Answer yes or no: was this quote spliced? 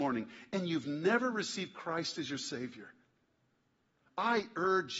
no